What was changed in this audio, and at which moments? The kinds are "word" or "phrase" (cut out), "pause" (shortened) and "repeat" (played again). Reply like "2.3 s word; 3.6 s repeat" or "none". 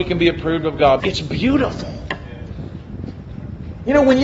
1.0 s word